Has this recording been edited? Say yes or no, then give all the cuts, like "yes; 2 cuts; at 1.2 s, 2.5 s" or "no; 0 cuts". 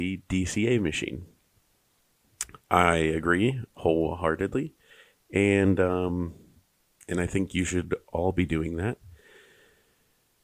no; 0 cuts